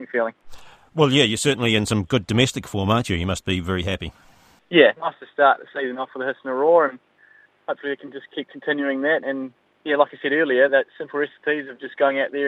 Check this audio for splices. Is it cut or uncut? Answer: cut